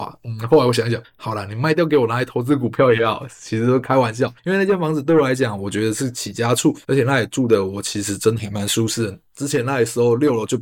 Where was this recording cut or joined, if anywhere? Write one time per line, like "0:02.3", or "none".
0:01.0
0:04.4
0:06.8